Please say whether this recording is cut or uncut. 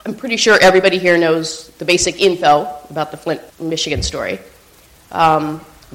cut